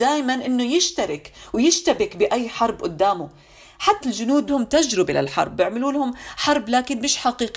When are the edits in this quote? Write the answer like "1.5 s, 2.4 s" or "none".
4.0 s, 4.5 s